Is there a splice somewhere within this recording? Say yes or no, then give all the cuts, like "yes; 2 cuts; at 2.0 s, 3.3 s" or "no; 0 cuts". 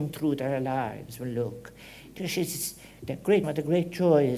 yes; 2 cuts; at 2.2 s, 3.4 s